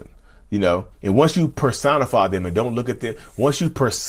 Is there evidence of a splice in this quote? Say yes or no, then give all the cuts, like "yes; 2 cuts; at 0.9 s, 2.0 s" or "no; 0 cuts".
yes; 1 cut; at 0.9 s